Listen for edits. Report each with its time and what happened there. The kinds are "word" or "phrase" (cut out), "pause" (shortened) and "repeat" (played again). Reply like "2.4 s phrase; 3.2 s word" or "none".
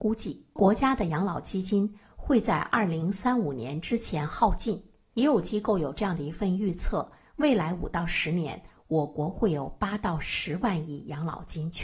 none